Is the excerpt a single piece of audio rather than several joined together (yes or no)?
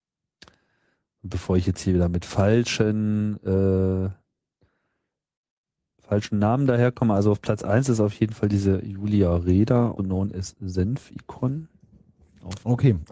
no